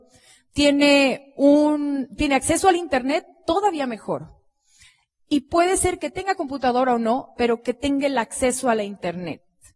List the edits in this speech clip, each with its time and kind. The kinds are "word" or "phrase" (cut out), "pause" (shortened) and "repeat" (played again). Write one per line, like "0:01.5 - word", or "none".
none